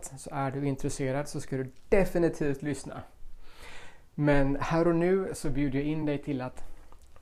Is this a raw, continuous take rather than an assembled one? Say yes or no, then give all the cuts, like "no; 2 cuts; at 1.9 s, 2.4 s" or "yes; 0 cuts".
yes; 0 cuts